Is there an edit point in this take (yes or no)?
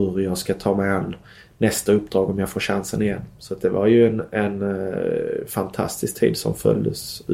no